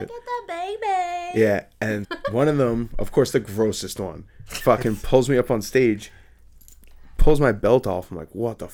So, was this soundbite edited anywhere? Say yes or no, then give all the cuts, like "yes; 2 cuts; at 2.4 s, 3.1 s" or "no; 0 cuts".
yes; 1 cut; at 2.0 s